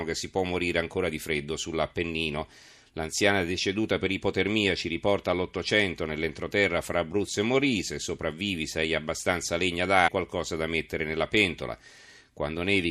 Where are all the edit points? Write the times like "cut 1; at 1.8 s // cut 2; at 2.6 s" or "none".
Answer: cut 1; at 10.1 s